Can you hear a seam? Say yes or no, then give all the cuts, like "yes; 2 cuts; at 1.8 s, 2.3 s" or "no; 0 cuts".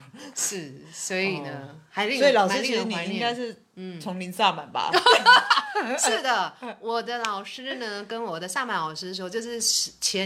no; 0 cuts